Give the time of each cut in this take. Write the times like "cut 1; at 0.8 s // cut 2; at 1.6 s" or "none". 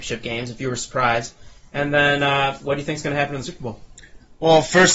none

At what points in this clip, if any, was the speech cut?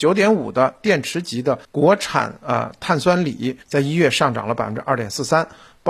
cut 1; at 1.6 s // cut 2; at 3.6 s

